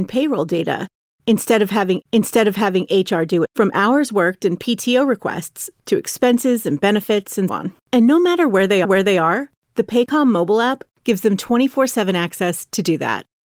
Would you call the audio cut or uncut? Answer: cut